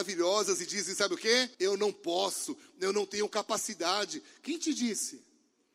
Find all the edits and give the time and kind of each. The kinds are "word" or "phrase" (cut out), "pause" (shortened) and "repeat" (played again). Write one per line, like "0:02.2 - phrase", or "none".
0:01.5 - pause

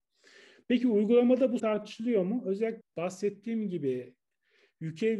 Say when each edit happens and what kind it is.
0:01.6 - word
0:02.8 - word

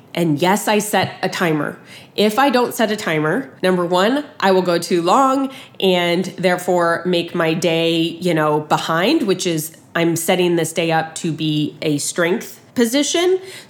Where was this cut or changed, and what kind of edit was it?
0:03.6 - pause
0:12.7 - pause

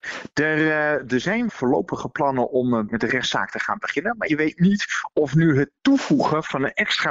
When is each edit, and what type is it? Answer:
0:01.5 - word
0:02.9 - word
0:04.3 - word

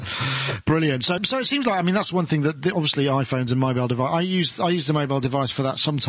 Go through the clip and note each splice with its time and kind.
0:01.2 - word

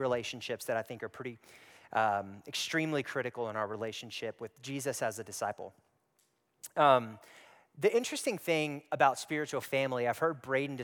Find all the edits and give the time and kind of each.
none

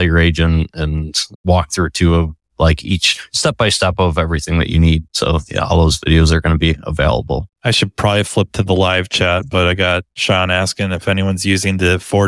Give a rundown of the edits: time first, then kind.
none

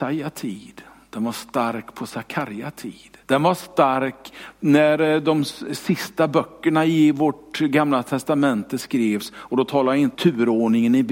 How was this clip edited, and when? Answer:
0:03.2 - pause
0:10.1 - word

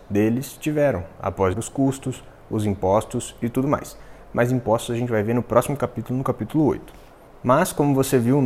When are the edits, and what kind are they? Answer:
0:01.5 - word

